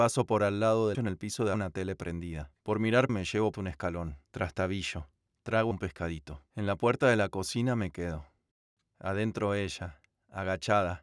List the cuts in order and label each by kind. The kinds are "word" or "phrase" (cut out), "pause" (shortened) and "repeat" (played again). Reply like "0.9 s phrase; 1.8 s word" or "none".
0.9 s phrase; 1.5 s word; 2.6 s pause; 3.1 s phrase; 3.5 s word; 4.2 s pause; 5.7 s phrase; 6.5 s pause